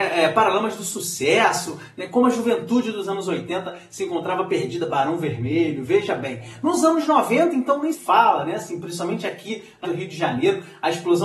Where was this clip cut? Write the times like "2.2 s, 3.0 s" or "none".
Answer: 7.9 s, 9.8 s